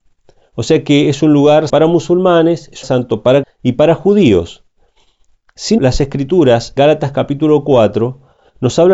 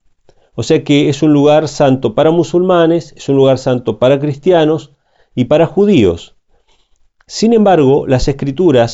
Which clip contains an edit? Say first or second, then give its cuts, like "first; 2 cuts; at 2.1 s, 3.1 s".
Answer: first; 5 cuts; at 1.7 s, 2.8 s, 3.4 s, 5.8 s, 6.8 s